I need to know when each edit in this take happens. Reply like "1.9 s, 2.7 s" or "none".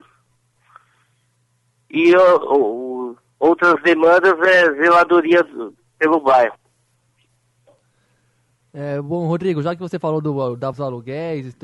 10.7 s

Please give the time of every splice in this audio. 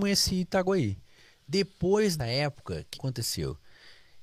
2.2 s, 2.9 s

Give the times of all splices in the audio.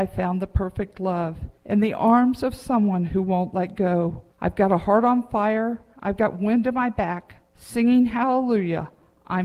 1.6 s, 4.3 s, 7.5 s

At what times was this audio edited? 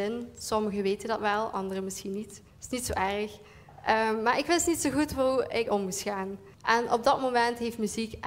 2.5 s, 5.7 s, 6.5 s

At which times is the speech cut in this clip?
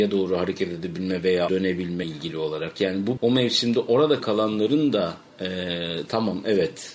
1.5 s, 2.0 s, 3.2 s, 4.2 s

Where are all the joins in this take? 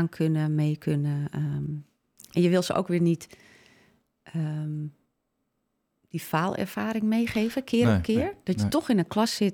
none

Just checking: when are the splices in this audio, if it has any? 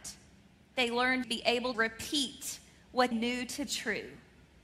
1.2 s, 1.7 s, 3.1 s, 3.7 s

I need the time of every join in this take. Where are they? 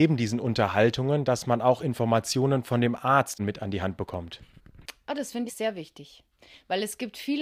5.5 s

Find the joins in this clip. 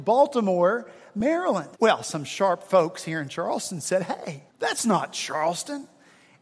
1.7 s, 4.5 s

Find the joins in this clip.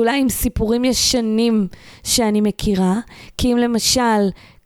none

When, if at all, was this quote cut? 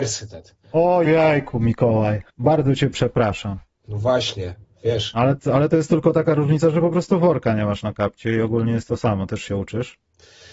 1.0 s, 2.3 s

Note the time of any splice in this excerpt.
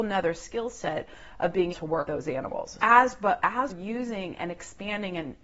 1.7 s, 2.1 s, 2.8 s, 3.7 s

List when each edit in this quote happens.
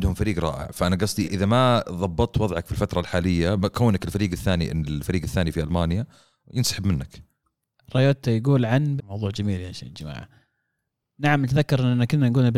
1.2 s, 9.0 s

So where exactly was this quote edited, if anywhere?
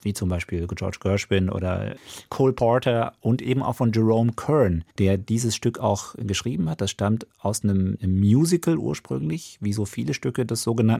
4.9 s

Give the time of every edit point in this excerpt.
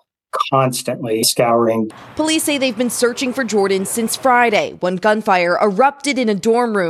1.2 s

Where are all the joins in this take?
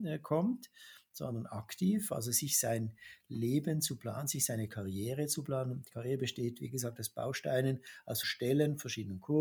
8.2 s

